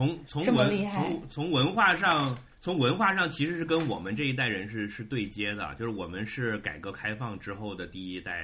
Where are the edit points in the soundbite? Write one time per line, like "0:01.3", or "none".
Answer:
0:02.5